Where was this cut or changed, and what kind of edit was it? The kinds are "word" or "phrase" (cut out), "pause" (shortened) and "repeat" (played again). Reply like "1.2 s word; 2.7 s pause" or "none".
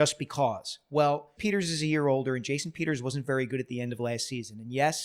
1.4 s word